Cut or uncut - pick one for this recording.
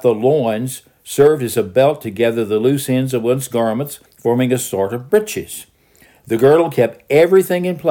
cut